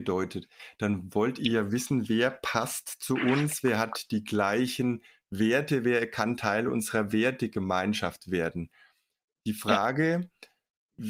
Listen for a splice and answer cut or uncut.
uncut